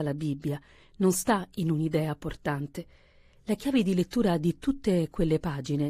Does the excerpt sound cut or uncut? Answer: uncut